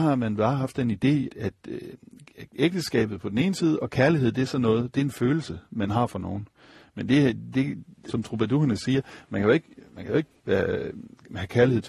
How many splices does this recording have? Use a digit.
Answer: 3